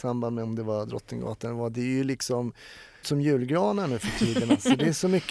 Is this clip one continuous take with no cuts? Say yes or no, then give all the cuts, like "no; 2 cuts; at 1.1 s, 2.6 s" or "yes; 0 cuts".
no; 1 cut; at 3.0 s